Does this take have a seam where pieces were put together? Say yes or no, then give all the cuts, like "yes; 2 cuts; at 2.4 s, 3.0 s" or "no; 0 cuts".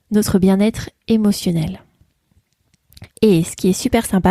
yes; 1 cut; at 3.1 s